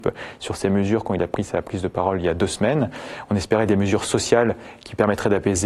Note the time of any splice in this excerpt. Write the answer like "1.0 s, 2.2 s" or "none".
none